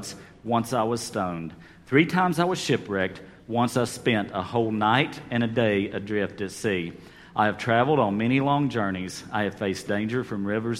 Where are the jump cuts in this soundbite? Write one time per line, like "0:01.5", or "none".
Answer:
none